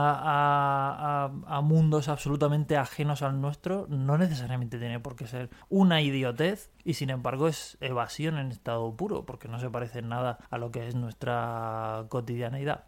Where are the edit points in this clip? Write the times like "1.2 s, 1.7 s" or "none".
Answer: 5.6 s, 6.7 s, 10.5 s